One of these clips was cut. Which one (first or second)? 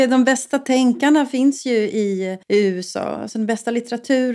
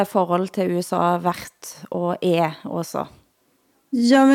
first